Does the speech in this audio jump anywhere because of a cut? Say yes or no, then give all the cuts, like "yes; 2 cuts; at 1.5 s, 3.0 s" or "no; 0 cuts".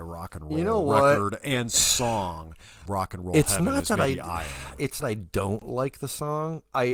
yes; 2 cuts; at 2.9 s, 5.0 s